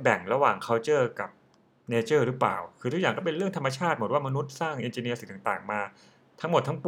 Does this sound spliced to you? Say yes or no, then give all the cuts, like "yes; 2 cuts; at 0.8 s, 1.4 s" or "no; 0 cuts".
no; 0 cuts